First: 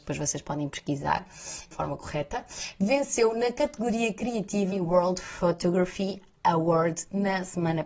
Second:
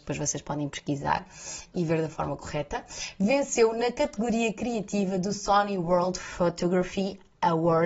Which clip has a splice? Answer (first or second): first